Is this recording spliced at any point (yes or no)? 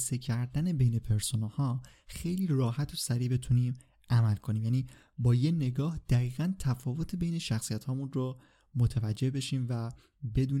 no